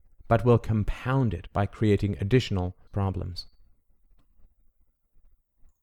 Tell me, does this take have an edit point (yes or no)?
yes